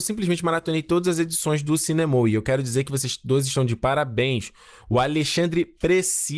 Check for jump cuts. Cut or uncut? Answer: uncut